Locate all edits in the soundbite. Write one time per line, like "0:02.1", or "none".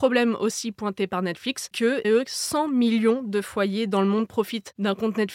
0:01.7
0:02.0